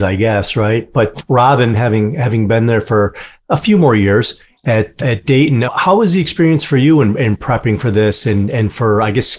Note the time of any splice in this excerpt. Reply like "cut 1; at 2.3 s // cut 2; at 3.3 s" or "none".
none